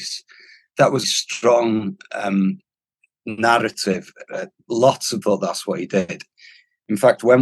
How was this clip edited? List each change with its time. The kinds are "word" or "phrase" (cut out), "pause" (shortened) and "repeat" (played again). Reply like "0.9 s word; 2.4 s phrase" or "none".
1.0 s phrase; 2.7 s pause; 5.2 s word